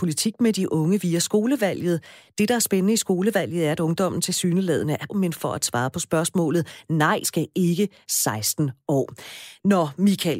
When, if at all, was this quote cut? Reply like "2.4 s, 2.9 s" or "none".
5.1 s, 7.2 s, 8.0 s